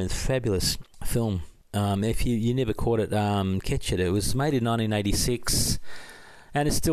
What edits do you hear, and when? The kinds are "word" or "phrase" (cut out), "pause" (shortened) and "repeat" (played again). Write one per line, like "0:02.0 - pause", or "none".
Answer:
none